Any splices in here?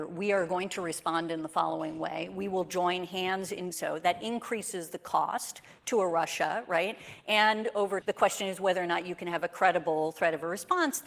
yes; 2 cuts; at 3.7 s, 8.0 s

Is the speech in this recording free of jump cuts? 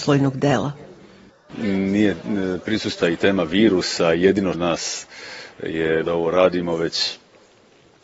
no; 3 cuts; at 3.0 s, 4.5 s, 6.0 s

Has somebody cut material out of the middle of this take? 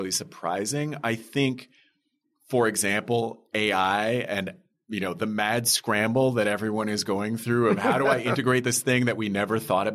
no; 0 cuts

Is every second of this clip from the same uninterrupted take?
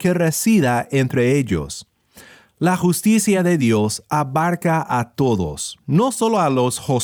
yes; 0 cuts

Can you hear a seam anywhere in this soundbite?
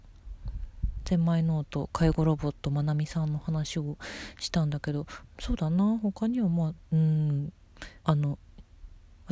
yes; 1 cut; at 8.0 s

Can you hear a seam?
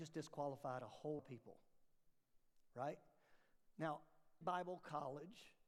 yes; 2 cuts; at 1.2 s, 4.4 s

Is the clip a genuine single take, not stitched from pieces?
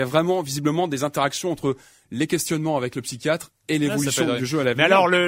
yes; 0 cuts

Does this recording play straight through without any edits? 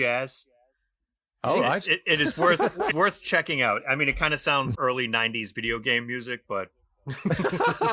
no; 2 cuts; at 2.9 s, 4.7 s

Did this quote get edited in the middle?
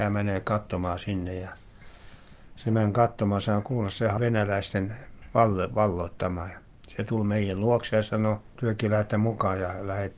yes; 1 cut; at 4.2 s

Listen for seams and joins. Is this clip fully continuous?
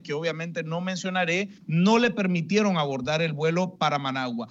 no; 1 cut; at 1.6 s

